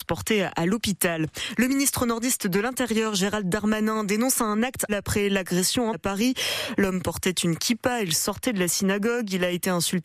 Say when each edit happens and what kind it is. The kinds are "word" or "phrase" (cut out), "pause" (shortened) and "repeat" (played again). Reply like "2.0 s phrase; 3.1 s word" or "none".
4.9 s word; 5.9 s phrase

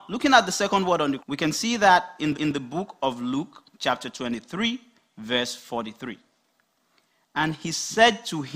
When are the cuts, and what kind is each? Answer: 1.2 s word; 2.3 s repeat; 3.7 s pause

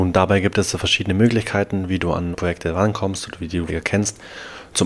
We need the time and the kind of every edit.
2.3 s word; 3.7 s word

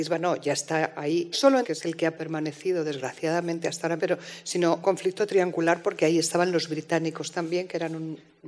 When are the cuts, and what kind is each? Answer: 1.3 s phrase; 1.6 s phrase; 4.0 s word; 4.8 s word

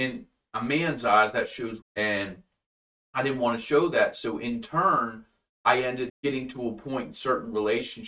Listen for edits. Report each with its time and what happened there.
1.8 s word; 6.1 s word

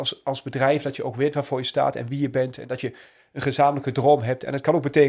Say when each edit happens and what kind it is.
none

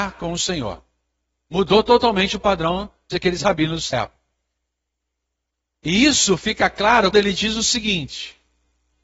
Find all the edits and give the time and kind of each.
3.1 s word; 3.9 s word; 7.1 s word

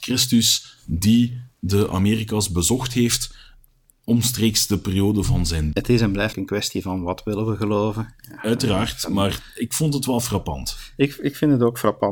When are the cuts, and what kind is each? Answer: 5.7 s word; 6.3 s word

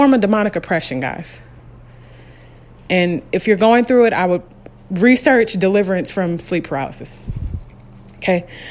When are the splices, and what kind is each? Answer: none

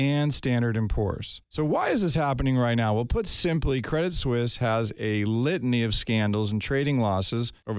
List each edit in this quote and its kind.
1.4 s pause

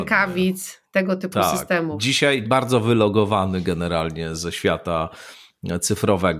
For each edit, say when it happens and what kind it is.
2.4 s word

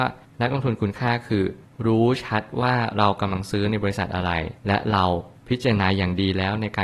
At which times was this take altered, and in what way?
4.6 s pause

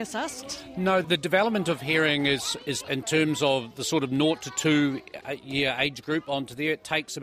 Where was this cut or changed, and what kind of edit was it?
1.0 s word; 2.8 s word; 5.2 s word

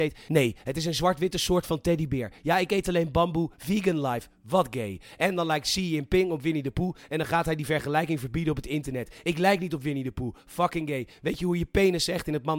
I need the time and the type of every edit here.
none

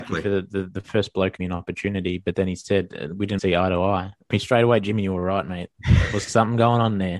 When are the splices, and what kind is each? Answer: 1.4 s phrase; 3.4 s word; 4.3 s phrase

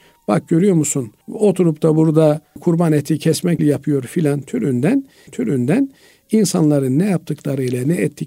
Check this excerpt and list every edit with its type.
1.2 s pause; 2.6 s word; 3.6 s phrase; 5.3 s repeat

